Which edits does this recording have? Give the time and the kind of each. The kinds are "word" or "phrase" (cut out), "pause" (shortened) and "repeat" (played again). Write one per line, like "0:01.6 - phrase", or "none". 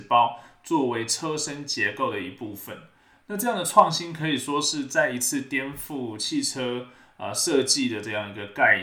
none